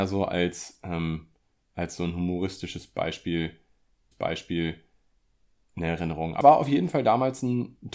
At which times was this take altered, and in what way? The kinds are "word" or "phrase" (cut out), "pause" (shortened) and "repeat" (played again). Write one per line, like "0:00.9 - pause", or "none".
0:04.1 - repeat
0:06.4 - word